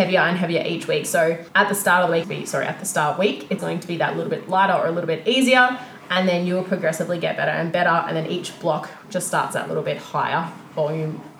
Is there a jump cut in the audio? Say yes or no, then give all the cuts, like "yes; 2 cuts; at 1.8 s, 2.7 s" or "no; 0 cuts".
yes; 3 cuts; at 1.5 s, 2.2 s, 3.6 s